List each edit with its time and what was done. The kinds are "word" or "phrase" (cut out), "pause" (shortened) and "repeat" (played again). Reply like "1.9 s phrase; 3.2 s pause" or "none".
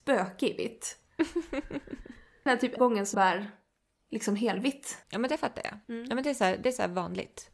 2.5 s phrase; 2.8 s word; 3.1 s word; 5.0 s pause; 5.8 s pause